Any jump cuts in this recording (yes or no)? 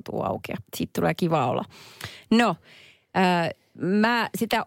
no